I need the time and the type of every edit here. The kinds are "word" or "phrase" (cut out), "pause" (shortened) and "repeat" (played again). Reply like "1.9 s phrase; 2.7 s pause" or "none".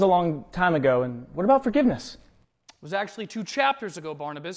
none